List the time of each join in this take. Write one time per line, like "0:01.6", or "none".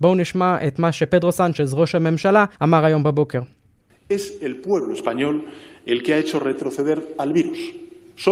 0:02.5